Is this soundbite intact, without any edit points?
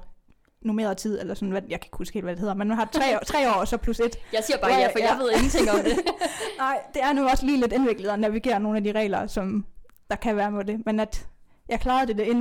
yes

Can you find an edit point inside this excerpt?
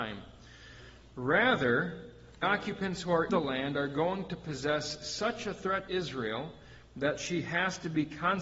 yes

